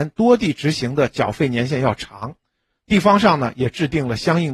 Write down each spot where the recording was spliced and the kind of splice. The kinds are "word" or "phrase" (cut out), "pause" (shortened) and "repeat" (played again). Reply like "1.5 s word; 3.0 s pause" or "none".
none